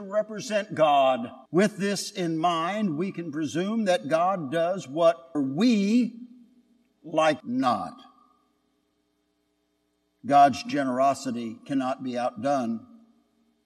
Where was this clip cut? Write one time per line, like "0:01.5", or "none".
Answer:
0:01.5
0:05.3
0:07.4